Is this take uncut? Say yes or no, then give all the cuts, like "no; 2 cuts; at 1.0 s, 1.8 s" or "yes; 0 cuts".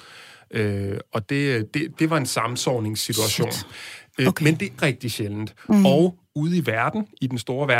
no; 2 cuts; at 2.0 s, 4.8 s